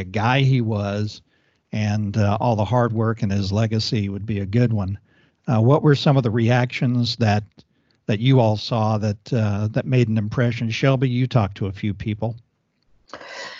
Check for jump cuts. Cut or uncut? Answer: uncut